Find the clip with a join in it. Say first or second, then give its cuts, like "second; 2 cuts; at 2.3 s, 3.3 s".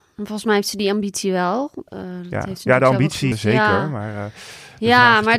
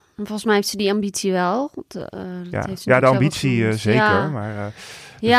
first; 2 cuts; at 1.9 s, 3.3 s